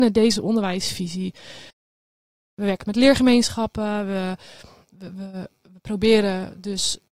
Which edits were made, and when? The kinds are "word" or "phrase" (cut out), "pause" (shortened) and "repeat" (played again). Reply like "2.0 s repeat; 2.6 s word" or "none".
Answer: none